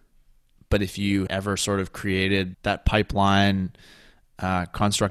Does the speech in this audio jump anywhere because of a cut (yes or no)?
yes